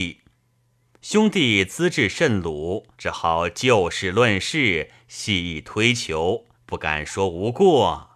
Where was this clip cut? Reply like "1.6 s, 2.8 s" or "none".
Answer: 2.9 s, 6.5 s